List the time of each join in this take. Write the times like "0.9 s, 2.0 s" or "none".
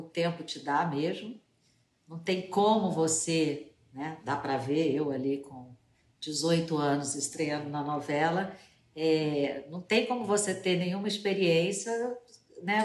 none